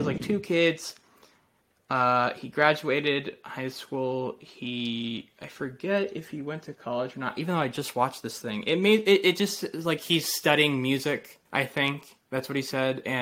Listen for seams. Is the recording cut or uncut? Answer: cut